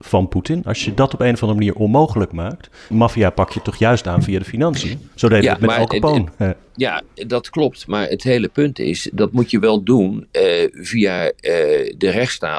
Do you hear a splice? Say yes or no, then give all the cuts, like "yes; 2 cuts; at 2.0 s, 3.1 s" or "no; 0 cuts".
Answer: no; 0 cuts